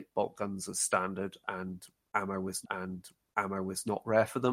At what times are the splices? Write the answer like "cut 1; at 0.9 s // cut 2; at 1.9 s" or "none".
cut 1; at 2.6 s